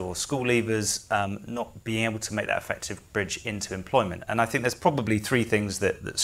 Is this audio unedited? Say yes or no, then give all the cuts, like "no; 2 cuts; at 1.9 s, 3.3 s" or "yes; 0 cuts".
yes; 0 cuts